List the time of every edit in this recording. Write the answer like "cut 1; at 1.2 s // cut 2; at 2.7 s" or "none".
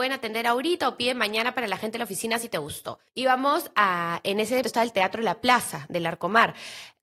cut 1; at 3.1 s // cut 2; at 4.6 s